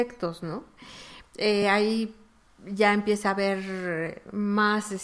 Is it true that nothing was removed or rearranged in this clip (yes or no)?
yes